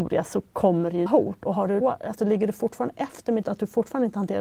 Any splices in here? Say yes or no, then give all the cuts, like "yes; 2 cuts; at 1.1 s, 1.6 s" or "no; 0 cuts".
yes; 3 cuts; at 1.1 s, 1.8 s, 3.4 s